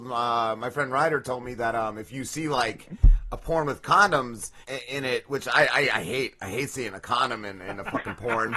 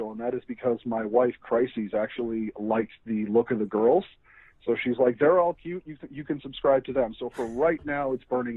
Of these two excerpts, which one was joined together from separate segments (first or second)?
first